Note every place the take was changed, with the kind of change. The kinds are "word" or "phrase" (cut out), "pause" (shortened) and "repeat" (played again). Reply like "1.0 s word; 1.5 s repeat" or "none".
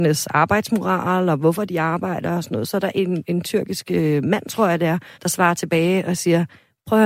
5.1 s pause